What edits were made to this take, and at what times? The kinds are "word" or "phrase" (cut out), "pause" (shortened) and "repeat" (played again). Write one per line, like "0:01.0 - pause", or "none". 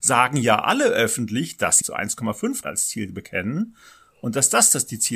0:01.8 - word
0:02.6 - word